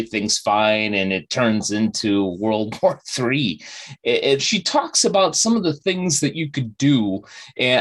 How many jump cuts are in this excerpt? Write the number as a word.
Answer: one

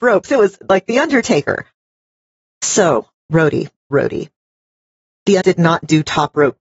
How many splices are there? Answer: two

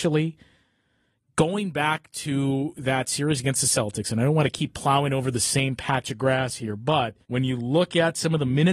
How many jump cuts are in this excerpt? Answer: one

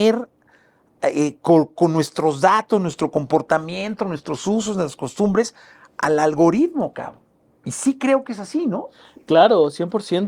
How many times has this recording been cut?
zero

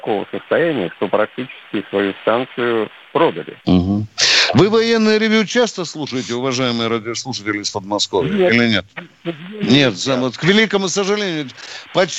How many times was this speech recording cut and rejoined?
one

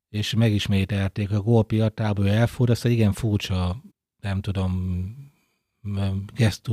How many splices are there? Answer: one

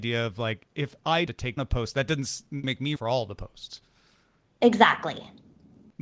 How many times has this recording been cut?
four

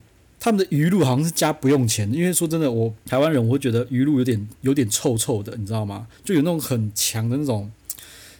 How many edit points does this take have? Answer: three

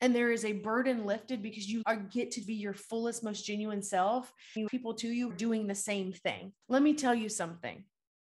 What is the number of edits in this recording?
five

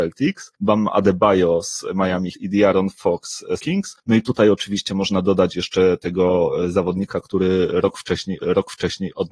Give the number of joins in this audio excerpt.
three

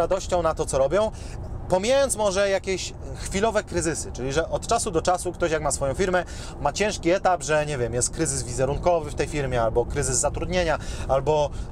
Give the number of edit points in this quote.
zero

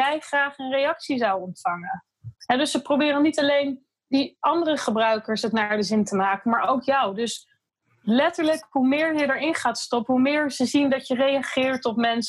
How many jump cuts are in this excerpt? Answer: one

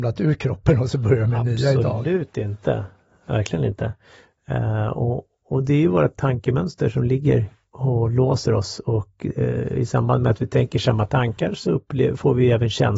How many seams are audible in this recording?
zero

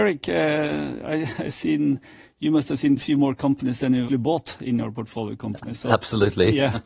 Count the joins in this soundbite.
two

